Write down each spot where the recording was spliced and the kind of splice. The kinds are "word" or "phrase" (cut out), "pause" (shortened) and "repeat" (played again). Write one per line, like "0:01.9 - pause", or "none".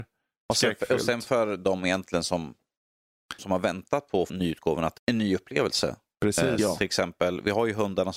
0:03.4 - word
0:04.3 - word
0:05.0 - word